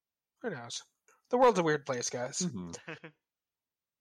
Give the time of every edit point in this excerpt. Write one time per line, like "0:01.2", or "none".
0:01.1